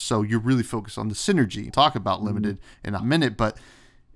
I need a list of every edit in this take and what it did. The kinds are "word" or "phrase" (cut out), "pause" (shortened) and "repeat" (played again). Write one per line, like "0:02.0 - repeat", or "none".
0:01.7 - word
0:03.0 - word